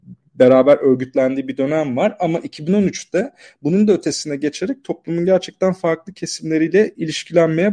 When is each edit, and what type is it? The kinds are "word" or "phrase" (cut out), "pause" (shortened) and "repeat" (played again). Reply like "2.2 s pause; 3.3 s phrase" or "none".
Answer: none

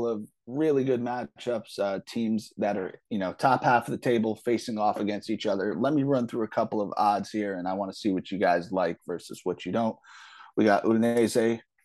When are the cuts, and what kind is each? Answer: none

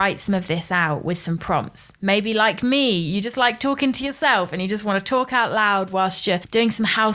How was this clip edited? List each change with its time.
none

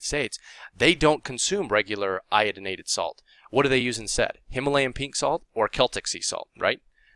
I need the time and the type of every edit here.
none

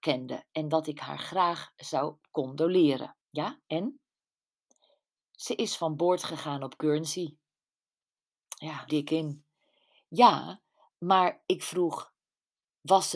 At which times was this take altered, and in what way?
3.2 s pause; 8.9 s phrase

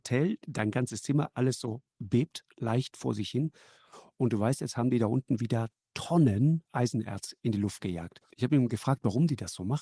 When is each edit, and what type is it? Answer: 1.9 s pause; 6.7 s pause; 8.3 s pause

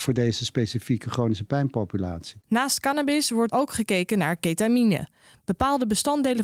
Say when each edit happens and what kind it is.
2.4 s pause; 3.5 s word

